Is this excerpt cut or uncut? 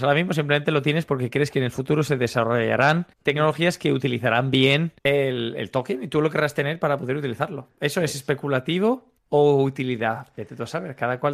cut